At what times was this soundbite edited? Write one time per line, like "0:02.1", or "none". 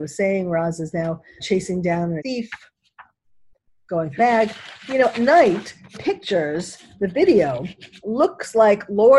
0:01.4
0:02.2
0:04.2
0:05.1
0:05.9